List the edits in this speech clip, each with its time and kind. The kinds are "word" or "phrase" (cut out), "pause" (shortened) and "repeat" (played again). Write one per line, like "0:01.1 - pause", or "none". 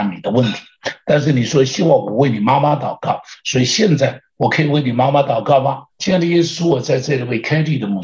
0:05.9 - pause